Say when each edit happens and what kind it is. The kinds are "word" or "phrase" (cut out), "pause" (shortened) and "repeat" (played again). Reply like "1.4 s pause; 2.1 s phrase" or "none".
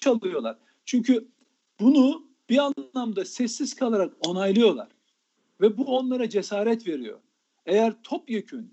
none